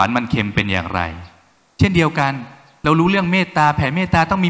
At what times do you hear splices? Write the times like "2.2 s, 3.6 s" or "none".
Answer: none